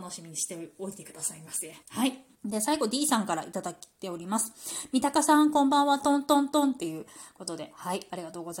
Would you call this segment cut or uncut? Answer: cut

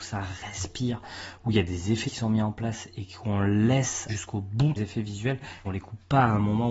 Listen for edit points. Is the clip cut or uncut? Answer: cut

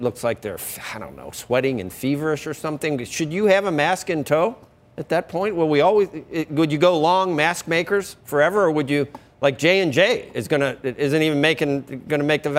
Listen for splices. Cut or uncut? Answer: uncut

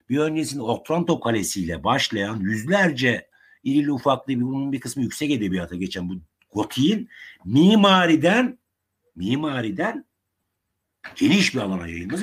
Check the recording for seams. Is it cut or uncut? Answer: uncut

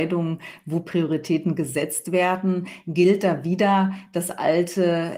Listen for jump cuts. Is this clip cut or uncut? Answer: uncut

